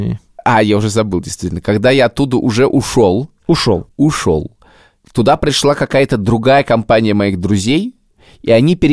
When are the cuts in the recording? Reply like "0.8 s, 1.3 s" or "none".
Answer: 3.4 s